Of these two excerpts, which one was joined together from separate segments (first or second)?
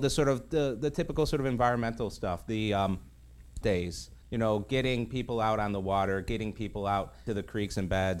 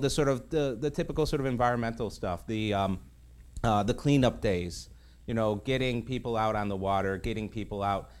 first